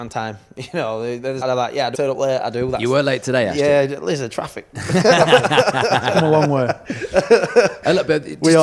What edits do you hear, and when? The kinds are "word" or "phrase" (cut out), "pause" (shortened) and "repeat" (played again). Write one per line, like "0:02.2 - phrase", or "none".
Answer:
0:01.4 - phrase
0:01.9 - word